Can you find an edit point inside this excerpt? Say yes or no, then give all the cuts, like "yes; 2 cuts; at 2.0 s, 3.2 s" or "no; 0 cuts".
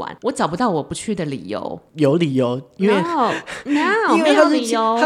no; 0 cuts